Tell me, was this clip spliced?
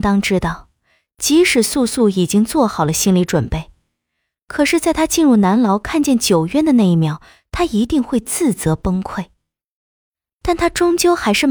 no; 0 cuts

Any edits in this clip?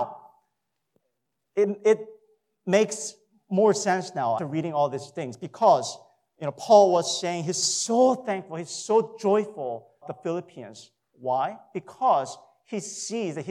yes; 2 cuts; at 4.4 s, 10.0 s

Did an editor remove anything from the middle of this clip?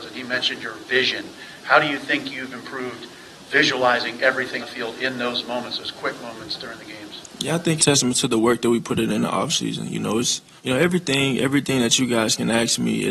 yes; 3 cuts; at 4.6 s, 7.8 s, 10.6 s

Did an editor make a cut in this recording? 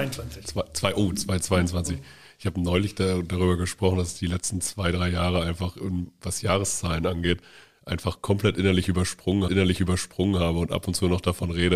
yes; 1 cut; at 9.5 s

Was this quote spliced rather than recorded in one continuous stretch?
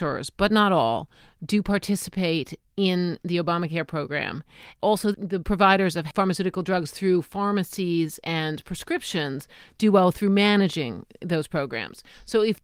no; 0 cuts

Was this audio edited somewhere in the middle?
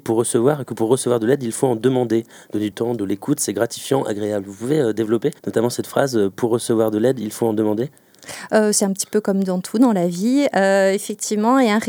yes; 2 cuts; at 2.7 s, 5.4 s

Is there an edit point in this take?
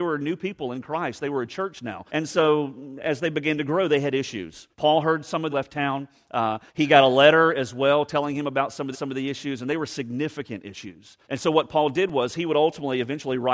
yes; 6 cuts; at 2.1 s, 4.7 s, 5.5 s, 6.7 s, 8.9 s, 11.2 s

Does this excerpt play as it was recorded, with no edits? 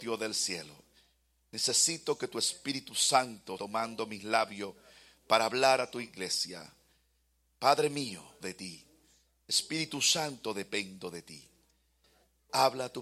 no; 2 cuts; at 3.6 s, 8.4 s

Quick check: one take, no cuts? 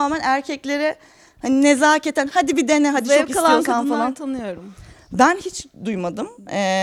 yes; 0 cuts

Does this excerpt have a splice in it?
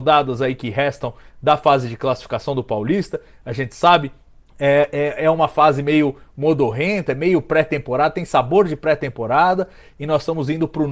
yes; 1 cut; at 4.3 s

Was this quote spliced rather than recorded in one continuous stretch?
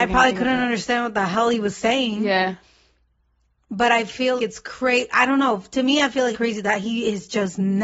yes; 2 cuts; at 4.4 s, 6.3 s

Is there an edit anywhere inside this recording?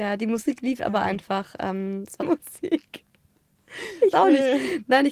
yes; 2 cuts; at 2.2 s, 4.1 s

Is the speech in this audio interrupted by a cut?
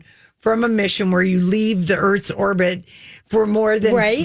no; 0 cuts

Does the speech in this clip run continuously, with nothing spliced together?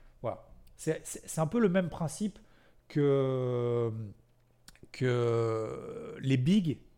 yes; 0 cuts

